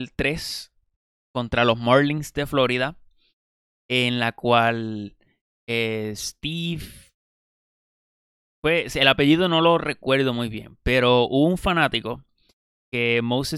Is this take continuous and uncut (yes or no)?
yes